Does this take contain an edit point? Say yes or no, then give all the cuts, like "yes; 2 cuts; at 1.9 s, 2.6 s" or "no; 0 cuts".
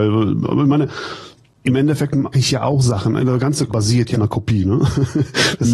yes; 4 cuts; at 2.3 s, 3.2 s, 3.7 s, 4.1 s